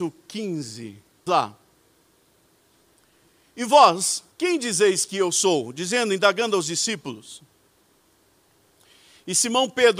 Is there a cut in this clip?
yes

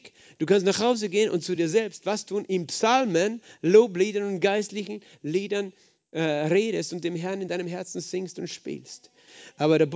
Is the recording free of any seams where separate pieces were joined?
yes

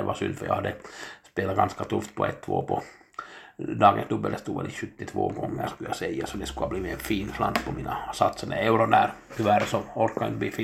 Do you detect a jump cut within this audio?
no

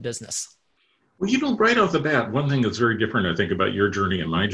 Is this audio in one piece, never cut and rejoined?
yes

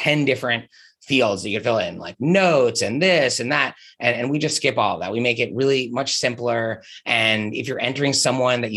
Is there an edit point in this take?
no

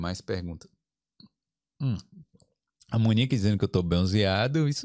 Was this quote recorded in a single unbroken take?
yes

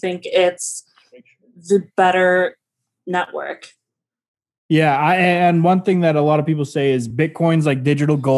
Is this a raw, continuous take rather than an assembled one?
yes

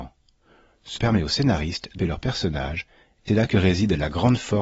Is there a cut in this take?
yes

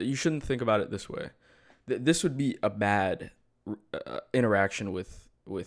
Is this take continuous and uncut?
yes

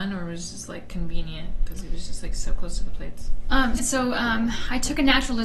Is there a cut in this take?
yes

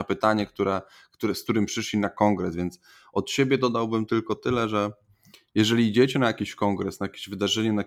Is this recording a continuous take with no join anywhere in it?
yes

